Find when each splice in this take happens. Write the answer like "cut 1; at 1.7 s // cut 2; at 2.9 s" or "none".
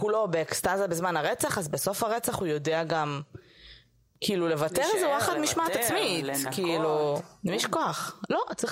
none